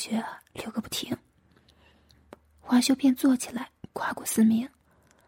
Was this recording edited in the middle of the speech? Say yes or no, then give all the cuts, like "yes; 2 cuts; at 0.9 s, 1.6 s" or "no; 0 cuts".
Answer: no; 0 cuts